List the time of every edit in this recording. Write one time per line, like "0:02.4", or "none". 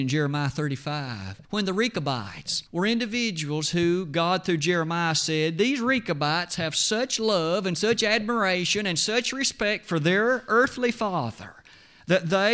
0:01.4
0:02.7